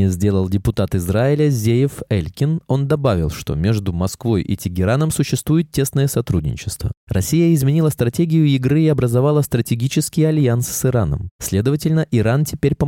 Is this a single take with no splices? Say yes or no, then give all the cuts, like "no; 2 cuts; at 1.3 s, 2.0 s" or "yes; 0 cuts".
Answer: yes; 0 cuts